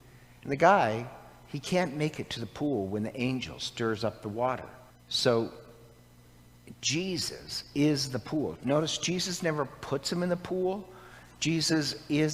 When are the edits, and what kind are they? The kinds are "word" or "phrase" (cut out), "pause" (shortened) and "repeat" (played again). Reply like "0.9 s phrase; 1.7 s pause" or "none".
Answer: 4.9 s pause

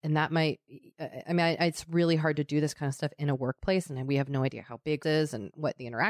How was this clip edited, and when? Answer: 5.0 s phrase

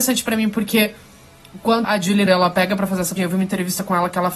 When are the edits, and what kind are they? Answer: 1.8 s word; 2.3 s word; 3.2 s word

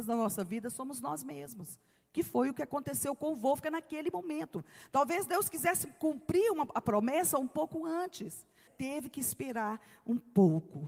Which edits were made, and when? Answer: 8.7 s phrase

